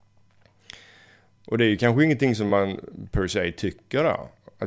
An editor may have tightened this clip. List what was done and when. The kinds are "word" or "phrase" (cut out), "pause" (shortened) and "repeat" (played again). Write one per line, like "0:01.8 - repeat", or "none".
none